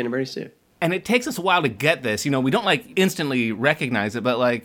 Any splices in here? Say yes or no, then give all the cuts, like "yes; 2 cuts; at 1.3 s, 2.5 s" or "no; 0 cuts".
yes; 1 cut; at 2.9 s